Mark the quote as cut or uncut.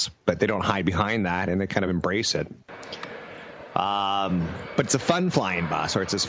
uncut